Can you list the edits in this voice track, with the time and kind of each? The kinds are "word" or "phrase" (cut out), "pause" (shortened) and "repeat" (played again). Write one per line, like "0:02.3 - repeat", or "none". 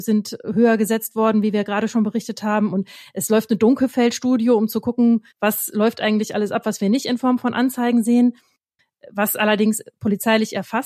0:05.3 - pause